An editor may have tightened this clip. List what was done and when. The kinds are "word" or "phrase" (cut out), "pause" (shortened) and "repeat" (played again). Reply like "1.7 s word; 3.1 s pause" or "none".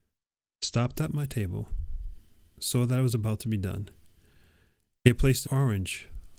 5.4 s word